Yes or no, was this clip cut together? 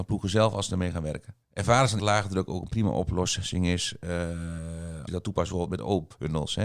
yes